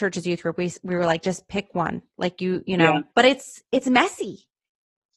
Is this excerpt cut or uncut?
cut